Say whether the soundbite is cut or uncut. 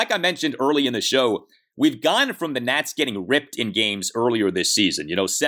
uncut